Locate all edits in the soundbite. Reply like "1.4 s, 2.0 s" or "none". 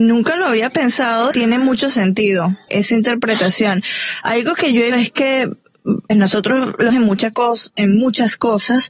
1.3 s, 2.7 s, 4.9 s, 6.1 s, 6.9 s